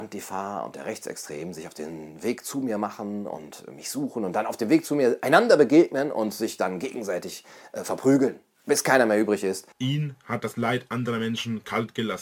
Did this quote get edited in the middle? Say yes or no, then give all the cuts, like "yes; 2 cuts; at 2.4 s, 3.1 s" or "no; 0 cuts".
yes; 1 cut; at 9.7 s